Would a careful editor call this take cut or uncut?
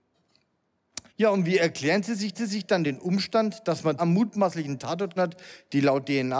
cut